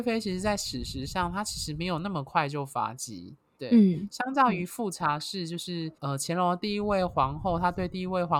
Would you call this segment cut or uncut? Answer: cut